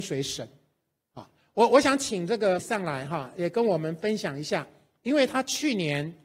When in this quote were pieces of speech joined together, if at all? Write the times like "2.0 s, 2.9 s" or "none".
2.6 s

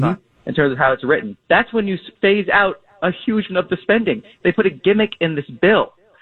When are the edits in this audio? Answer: 1.4 s, 3.5 s

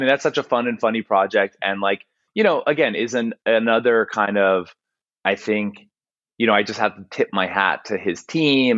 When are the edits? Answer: none

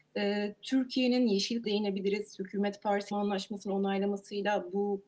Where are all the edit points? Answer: 1.6 s, 3.1 s

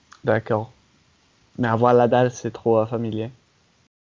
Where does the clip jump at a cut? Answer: none

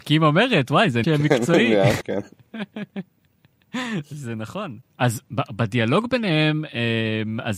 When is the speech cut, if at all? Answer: 1.0 s, 2.0 s

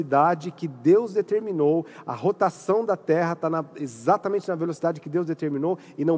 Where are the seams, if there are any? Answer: none

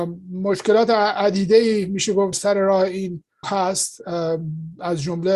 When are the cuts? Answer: 2.3 s, 3.4 s

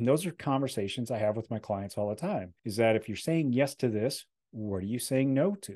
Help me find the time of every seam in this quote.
2.6 s

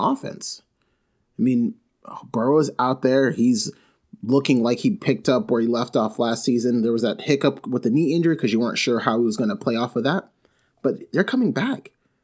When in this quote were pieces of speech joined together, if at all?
none

